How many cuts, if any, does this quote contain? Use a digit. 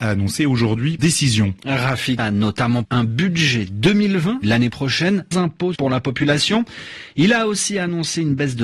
6